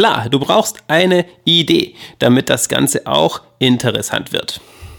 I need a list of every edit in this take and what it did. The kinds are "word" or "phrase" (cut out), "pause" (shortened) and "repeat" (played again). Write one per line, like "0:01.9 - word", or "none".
none